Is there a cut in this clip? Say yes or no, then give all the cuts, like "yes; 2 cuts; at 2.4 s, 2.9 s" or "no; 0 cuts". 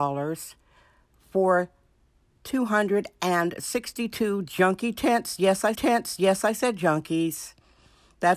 yes; 1 cut; at 5.7 s